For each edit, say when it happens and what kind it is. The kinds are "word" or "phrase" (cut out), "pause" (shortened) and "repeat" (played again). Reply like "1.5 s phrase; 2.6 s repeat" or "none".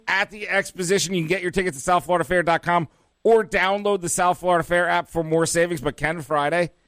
none